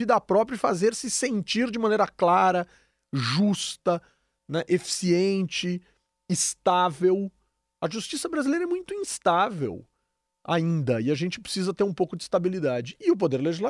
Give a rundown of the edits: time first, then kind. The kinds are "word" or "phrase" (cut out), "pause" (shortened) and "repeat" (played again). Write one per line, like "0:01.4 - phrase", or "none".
none